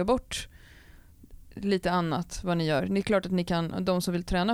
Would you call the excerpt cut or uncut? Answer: uncut